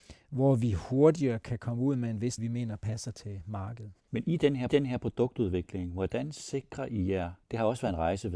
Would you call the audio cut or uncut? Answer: cut